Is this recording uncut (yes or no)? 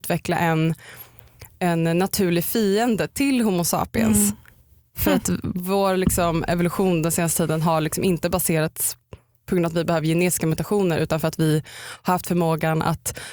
yes